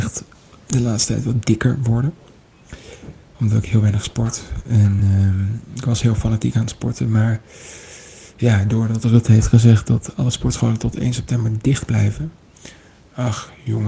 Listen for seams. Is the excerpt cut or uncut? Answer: uncut